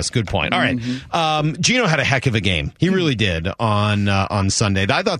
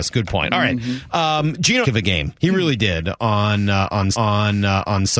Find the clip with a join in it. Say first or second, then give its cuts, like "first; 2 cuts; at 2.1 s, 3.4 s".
second; 2 cuts; at 1.8 s, 4.1 s